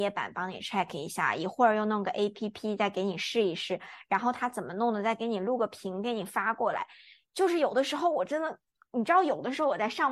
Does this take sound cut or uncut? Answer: uncut